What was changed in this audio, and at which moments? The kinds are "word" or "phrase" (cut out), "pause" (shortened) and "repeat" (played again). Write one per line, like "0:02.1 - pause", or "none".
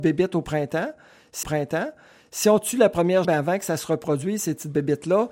0:01.4 - repeat
0:03.2 - word